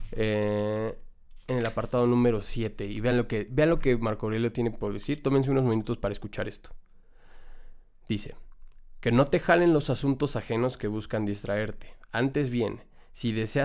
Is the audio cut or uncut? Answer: uncut